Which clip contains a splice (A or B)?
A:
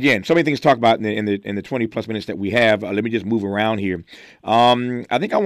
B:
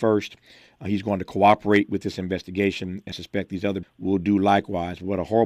B